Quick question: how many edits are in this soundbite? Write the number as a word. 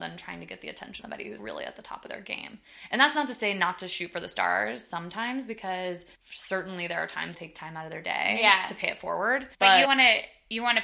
six